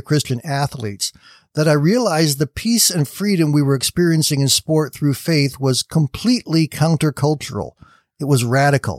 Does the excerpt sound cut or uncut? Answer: uncut